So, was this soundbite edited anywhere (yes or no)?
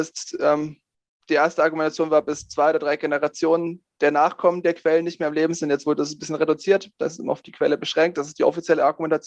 no